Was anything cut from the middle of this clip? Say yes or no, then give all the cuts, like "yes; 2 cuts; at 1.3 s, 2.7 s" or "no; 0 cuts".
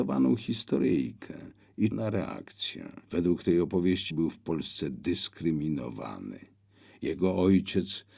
yes; 3 cuts; at 1.9 s, 3.0 s, 4.1 s